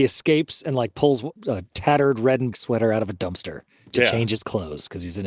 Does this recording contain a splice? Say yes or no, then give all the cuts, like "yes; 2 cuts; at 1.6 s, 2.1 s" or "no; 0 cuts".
yes; 2 cuts; at 1.4 s, 2.5 s